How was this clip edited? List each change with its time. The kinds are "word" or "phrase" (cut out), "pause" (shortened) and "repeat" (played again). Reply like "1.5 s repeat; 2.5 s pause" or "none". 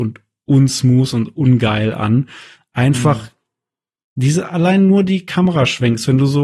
none